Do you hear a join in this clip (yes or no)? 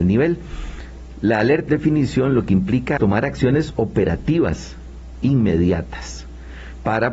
yes